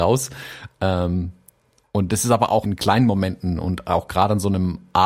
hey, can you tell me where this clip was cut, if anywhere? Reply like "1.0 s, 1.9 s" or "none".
2.6 s